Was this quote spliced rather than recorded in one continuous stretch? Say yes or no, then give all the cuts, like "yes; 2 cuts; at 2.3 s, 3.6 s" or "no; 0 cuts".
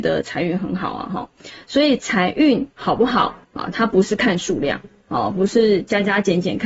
yes; 2 cuts; at 2.7 s, 3.4 s